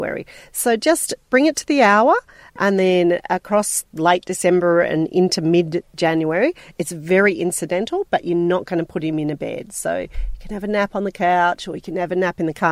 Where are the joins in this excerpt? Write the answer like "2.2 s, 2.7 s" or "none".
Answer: none